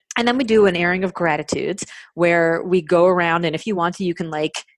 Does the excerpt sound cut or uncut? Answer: uncut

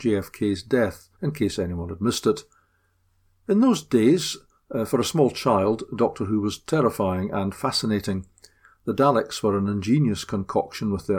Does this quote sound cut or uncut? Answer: cut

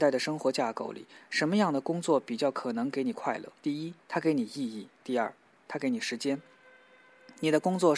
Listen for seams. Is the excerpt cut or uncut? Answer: cut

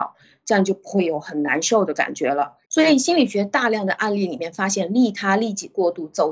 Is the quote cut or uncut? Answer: cut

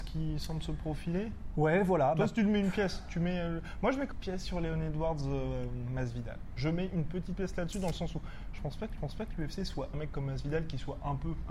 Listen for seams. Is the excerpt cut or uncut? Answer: cut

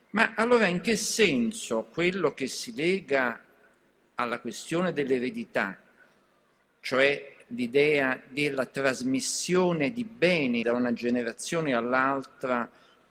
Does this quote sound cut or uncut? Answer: cut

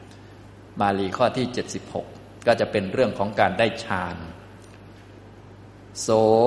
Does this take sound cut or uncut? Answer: uncut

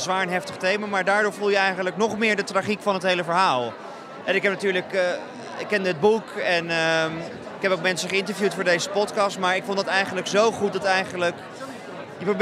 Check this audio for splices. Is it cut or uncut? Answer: uncut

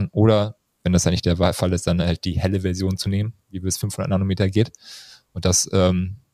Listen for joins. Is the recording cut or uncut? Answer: uncut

